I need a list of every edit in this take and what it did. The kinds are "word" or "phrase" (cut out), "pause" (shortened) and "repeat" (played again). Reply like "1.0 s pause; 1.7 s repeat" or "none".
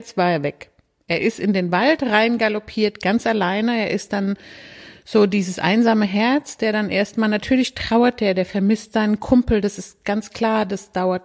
none